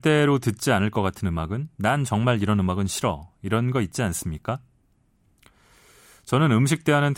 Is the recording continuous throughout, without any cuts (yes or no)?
yes